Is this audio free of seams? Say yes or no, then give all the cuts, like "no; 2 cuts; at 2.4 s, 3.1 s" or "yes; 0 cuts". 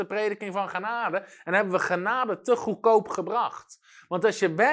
yes; 0 cuts